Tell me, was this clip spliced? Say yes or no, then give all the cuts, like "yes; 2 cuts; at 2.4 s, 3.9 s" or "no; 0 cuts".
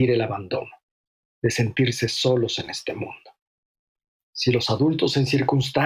no; 0 cuts